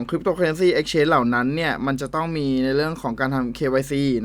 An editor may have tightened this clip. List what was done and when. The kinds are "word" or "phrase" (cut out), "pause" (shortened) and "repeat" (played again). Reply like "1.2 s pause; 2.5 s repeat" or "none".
none